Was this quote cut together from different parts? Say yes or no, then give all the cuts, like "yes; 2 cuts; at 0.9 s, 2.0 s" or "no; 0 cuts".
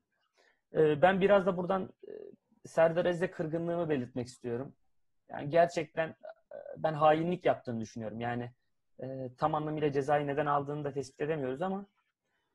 no; 0 cuts